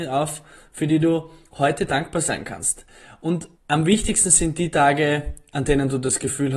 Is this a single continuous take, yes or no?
no